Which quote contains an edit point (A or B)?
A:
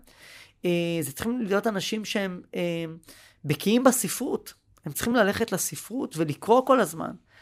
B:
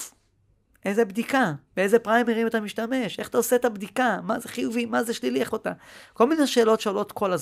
B